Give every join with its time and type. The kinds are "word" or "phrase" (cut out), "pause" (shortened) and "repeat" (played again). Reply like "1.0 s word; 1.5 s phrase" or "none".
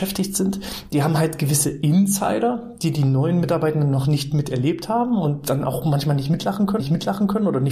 6.8 s repeat